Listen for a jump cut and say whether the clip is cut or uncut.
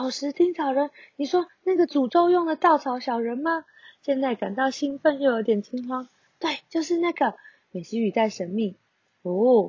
uncut